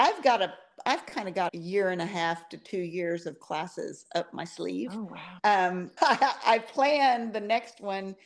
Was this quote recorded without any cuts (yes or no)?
no